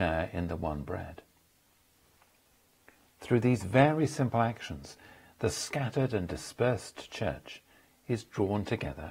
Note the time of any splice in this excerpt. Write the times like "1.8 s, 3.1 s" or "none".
none